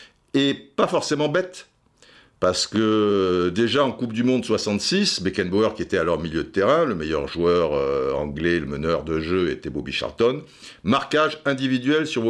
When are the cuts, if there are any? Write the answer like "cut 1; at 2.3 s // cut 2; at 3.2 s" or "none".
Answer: none